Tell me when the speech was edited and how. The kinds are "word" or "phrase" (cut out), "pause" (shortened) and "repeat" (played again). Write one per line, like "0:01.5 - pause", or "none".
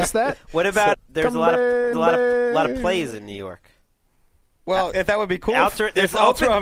0:00.9 - word
0:01.9 - repeat
0:04.9 - word